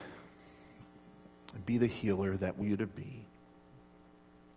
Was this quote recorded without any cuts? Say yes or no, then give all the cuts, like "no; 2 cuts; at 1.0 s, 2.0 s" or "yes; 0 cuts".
no; 1 cut; at 2.6 s